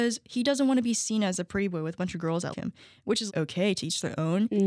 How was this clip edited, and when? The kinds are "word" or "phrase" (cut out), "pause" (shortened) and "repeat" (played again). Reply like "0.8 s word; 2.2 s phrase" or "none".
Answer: 2.5 s word; 3.3 s word